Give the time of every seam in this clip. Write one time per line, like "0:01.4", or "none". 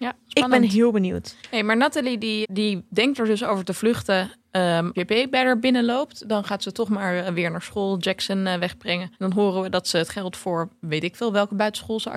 0:01.4
0:02.4
0:05.0
0:09.1